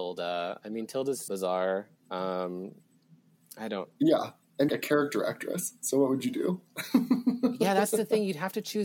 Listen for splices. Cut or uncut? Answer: cut